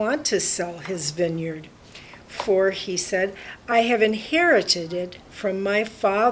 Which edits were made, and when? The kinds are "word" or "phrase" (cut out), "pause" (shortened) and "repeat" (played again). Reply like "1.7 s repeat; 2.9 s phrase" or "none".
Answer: none